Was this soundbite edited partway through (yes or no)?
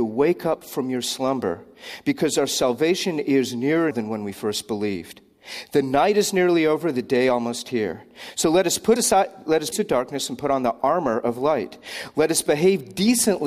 yes